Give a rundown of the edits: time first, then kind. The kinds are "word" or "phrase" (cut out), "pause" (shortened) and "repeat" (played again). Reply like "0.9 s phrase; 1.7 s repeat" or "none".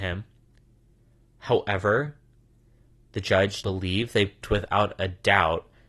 3.6 s word; 4.4 s word